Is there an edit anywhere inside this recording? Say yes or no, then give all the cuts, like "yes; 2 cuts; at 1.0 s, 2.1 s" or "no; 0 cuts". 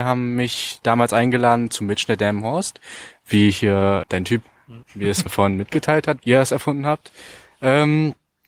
yes; 4 cuts; at 4.0 s, 4.8 s, 5.3 s, 6.2 s